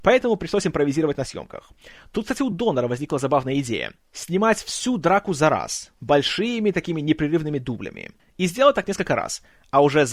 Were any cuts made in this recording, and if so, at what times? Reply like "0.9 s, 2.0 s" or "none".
none